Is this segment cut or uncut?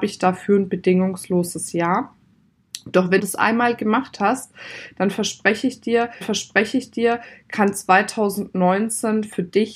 cut